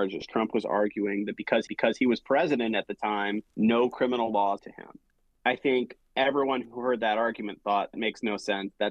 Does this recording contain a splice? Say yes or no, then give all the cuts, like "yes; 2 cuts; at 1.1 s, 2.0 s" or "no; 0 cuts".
yes; 5 cuts; at 1.7 s, 3.5 s, 4.6 s, 5.1 s, 7.9 s